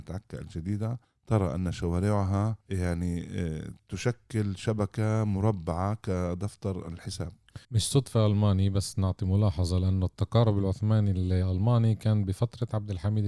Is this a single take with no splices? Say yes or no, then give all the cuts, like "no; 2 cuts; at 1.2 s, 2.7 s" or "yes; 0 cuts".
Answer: no; 3 cuts; at 1.0 s, 2.6 s, 7.6 s